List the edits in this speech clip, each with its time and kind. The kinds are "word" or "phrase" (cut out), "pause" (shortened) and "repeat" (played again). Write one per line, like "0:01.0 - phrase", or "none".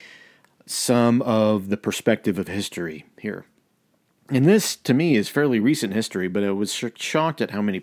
none